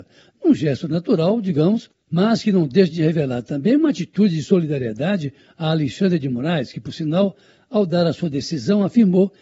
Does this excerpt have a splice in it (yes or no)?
no